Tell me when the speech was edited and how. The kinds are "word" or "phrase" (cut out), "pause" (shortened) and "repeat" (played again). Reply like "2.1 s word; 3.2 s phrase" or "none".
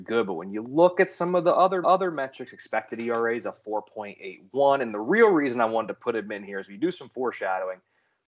1.8 s repeat